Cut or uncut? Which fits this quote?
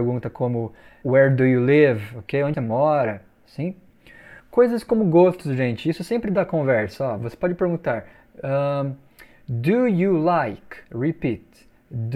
cut